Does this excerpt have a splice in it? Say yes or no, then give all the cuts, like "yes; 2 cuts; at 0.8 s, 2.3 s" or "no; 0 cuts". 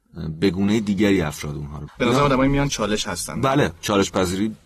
yes; 2 cuts; at 1.9 s, 2.7 s